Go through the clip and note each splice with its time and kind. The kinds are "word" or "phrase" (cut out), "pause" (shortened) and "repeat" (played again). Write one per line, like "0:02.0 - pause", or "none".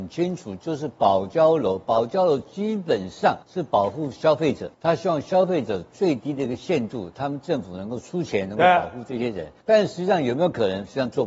0:03.4 - pause
0:04.7 - pause
0:09.6 - pause